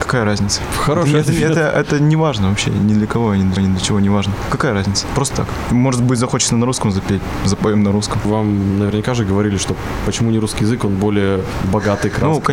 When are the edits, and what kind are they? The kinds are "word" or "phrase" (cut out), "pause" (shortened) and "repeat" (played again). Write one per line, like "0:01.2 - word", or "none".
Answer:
0:03.6 - repeat
0:05.3 - word